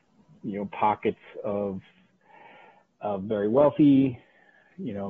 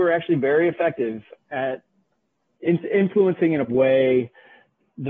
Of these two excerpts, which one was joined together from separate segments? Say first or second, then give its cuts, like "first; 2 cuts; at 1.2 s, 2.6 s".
second; 2 cuts; at 1.4 s, 3.7 s